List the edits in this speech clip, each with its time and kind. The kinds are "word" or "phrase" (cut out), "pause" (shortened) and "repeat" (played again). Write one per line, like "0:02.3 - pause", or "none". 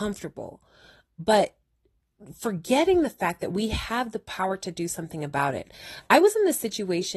none